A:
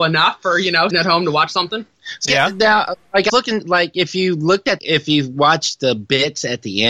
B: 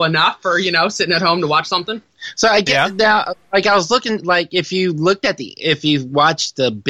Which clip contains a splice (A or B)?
A